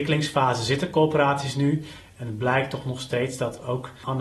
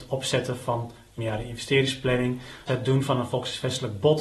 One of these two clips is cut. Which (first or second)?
second